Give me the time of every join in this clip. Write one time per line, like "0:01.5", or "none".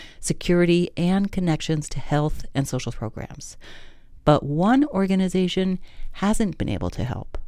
0:02.9